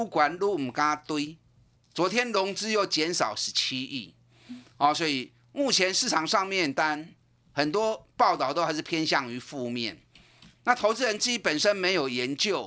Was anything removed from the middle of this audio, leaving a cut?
no; 0 cuts

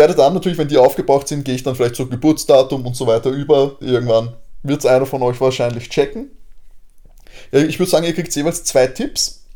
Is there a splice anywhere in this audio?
yes; 1 cut; at 3.8 s

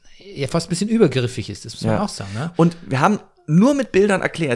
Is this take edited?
no; 0 cuts

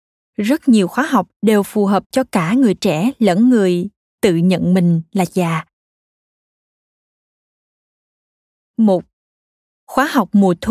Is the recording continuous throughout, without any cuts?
yes; 0 cuts

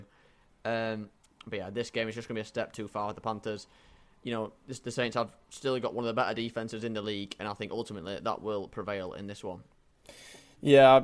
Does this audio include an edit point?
no; 0 cuts

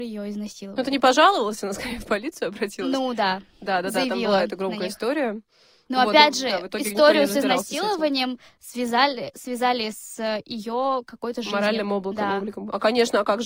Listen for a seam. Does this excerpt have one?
no; 0 cuts

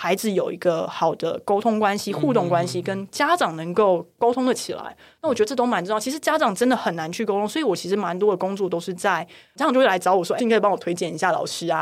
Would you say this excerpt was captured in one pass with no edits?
no; 1 cut; at 10.4 s

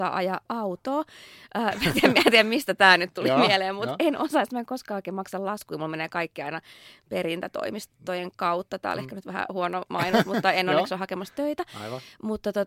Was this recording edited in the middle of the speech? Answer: no; 0 cuts

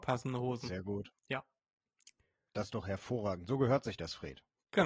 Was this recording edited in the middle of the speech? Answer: yes; 1 cut; at 1.2 s

